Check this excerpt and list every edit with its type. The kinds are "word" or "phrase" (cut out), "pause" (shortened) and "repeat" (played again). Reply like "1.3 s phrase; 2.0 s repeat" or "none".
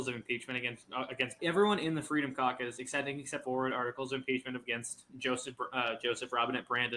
1.4 s phrase; 3.4 s phrase